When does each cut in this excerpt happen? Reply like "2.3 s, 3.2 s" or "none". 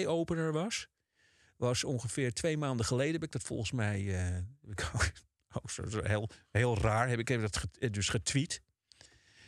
none